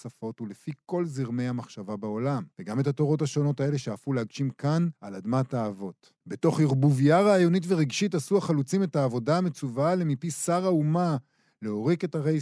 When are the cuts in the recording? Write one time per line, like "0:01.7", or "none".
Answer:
0:02.5
0:05.0
0:06.2